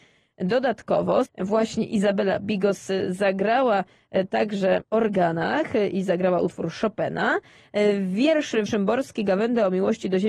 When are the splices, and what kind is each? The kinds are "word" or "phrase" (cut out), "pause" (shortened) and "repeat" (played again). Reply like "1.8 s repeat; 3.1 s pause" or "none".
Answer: 1.3 s word; 4.8 s word; 8.7 s word